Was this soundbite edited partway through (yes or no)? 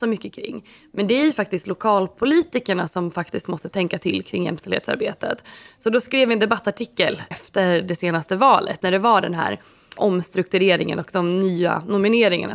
yes